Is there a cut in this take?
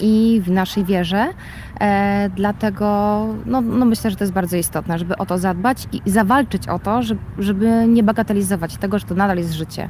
no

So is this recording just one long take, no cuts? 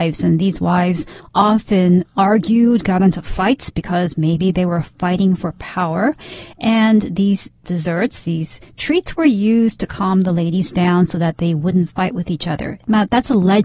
yes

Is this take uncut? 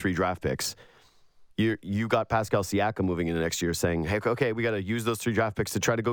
no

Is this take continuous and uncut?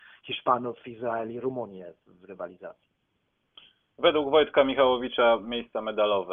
yes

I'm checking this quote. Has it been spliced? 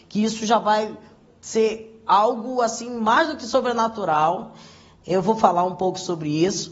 no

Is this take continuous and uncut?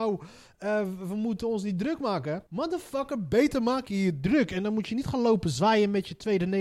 no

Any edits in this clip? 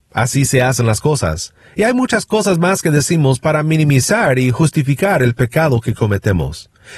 no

